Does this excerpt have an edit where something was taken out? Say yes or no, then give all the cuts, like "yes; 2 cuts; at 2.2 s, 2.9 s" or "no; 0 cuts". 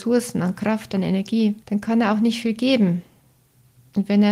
yes; 1 cut; at 1.6 s